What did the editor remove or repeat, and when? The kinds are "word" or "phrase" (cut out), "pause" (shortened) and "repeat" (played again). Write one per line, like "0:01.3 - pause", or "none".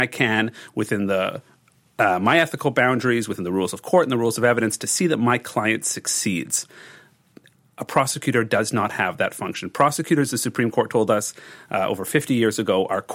none